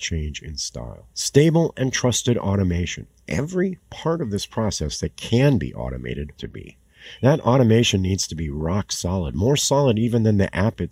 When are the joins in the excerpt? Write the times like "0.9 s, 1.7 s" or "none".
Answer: 1.1 s, 6.4 s